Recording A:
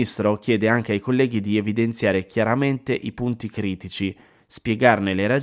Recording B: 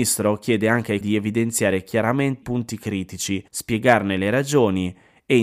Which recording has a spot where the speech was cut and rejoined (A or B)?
B